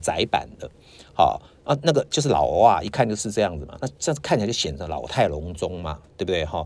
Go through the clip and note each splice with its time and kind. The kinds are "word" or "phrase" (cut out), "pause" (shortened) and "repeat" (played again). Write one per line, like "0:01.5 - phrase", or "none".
none